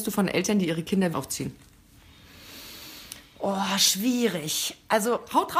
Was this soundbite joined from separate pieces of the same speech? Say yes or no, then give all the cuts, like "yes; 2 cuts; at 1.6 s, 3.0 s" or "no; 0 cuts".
yes; 1 cut; at 1.1 s